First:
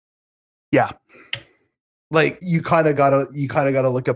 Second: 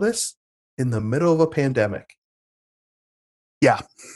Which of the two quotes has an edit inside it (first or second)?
first